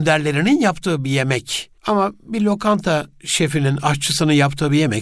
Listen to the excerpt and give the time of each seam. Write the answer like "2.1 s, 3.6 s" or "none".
1.8 s